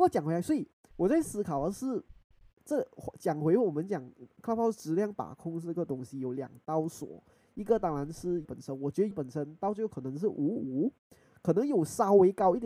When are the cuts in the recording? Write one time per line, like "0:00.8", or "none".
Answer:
0:08.4
0:09.1